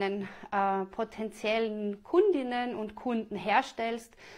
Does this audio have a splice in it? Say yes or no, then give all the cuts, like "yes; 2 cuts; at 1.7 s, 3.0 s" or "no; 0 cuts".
no; 0 cuts